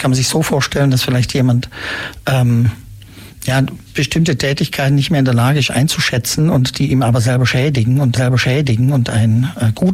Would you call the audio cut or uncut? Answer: cut